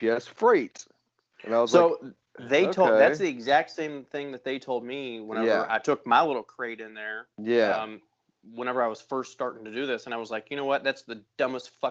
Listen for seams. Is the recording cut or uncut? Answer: uncut